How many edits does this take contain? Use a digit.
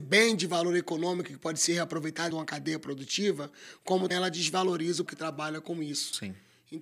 3